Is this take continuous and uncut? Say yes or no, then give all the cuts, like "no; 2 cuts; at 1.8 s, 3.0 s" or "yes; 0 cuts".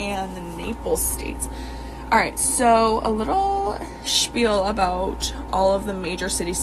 yes; 0 cuts